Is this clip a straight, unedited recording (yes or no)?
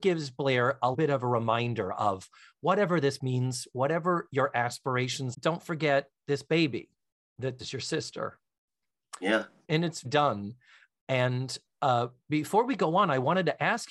no